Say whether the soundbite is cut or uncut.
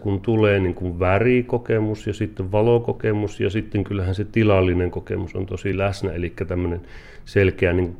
uncut